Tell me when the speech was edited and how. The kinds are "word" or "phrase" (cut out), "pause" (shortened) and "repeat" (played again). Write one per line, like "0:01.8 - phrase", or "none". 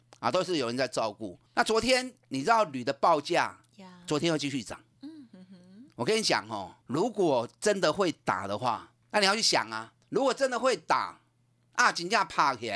0:01.5 - pause
0:02.2 - pause
0:06.8 - pause
0:09.0 - pause
0:10.0 - pause